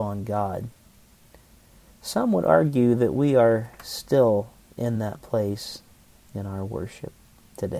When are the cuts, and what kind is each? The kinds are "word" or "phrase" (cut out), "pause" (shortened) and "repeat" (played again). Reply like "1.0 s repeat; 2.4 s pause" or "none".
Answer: none